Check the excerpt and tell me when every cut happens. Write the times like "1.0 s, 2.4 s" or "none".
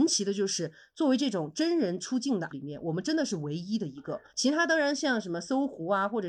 2.5 s, 4.3 s

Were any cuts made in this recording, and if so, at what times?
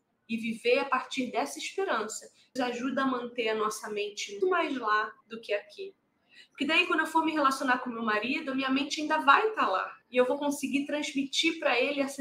2.6 s, 4.4 s, 5.2 s, 10.0 s

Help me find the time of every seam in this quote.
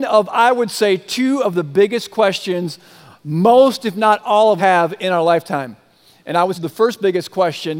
4.6 s, 6.5 s

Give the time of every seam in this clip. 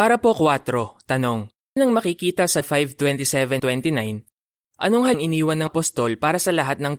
1.8 s, 2.6 s, 3.6 s, 5.1 s, 5.7 s

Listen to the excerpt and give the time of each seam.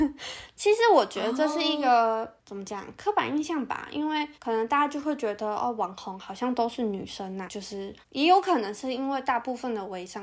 2.4 s, 4.3 s, 7.5 s, 8.0 s

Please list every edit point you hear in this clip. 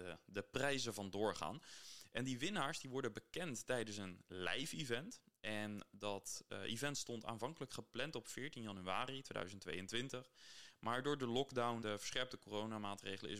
11.8 s

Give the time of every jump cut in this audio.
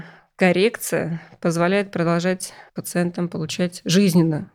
2.7 s

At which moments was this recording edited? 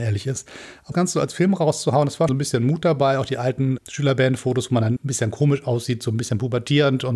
0.9 s, 2.3 s, 3.8 s, 5.0 s

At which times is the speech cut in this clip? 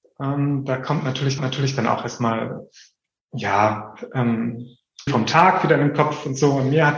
1.4 s, 5.1 s

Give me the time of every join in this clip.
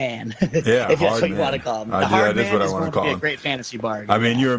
none

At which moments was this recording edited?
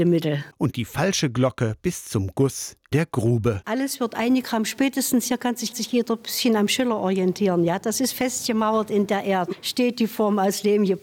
2.9 s, 5.7 s

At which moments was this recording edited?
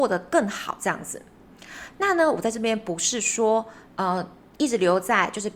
none

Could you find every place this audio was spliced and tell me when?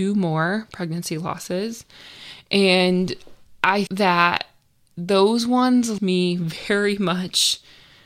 3.9 s, 6.0 s

